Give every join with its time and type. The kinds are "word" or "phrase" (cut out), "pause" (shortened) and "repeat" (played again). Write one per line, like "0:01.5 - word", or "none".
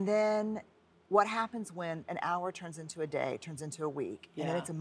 0:00.9 - pause